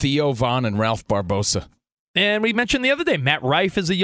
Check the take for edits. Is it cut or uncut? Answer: uncut